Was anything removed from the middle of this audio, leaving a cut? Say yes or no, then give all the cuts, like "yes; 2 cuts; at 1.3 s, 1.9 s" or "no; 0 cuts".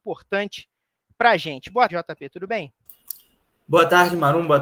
yes; 1 cut; at 1.9 s